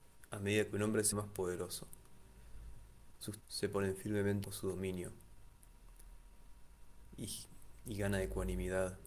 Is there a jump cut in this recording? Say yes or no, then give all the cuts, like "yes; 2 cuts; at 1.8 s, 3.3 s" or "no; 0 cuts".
yes; 3 cuts; at 1.1 s, 3.4 s, 4.4 s